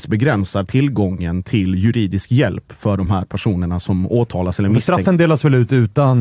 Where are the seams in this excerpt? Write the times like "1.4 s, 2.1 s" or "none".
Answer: none